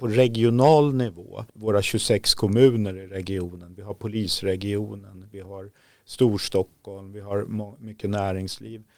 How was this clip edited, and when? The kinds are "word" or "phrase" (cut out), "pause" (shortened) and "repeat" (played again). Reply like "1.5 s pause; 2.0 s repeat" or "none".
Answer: 1.5 s pause